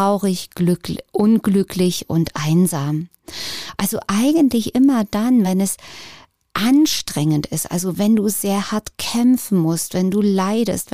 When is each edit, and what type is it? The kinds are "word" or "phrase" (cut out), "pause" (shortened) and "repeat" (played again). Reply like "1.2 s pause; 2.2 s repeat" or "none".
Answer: none